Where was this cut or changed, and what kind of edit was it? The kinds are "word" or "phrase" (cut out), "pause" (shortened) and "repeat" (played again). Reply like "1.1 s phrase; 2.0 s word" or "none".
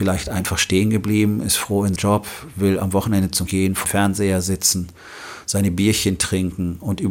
2.0 s word; 3.5 s word; 3.8 s word